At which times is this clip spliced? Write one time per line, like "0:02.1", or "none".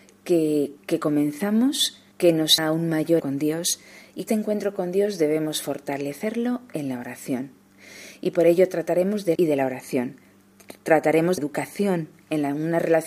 0:02.1
0:02.6
0:03.2
0:04.3
0:09.3
0:10.8
0:11.4